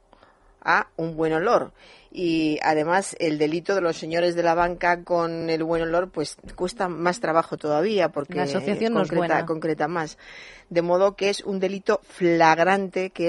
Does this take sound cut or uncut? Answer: uncut